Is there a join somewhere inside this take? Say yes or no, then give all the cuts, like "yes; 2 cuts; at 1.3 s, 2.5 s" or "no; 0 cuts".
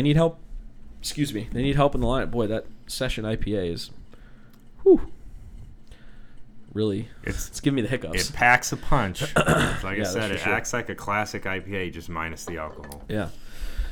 no; 0 cuts